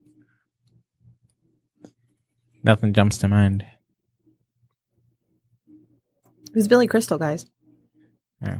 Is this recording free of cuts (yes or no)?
yes